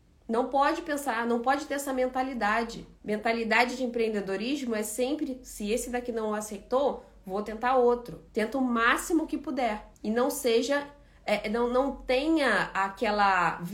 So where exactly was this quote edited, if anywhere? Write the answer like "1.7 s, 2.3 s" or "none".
2.9 s, 8.3 s, 9.9 s